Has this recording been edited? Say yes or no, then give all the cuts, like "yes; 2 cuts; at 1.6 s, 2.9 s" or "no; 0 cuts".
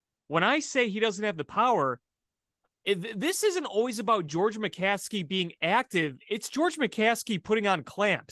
no; 0 cuts